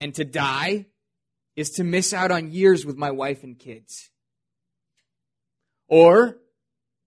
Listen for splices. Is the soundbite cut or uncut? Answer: uncut